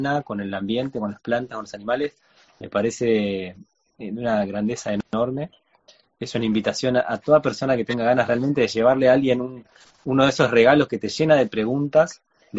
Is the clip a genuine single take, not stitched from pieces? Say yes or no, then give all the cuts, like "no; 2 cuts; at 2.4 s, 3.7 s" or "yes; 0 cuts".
yes; 0 cuts